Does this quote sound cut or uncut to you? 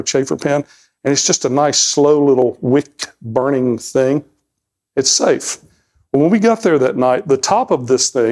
uncut